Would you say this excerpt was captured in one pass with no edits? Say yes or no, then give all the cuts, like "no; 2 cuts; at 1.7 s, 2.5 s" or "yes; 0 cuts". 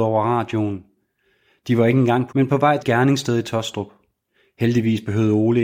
no; 2 cuts; at 2.3 s, 2.8 s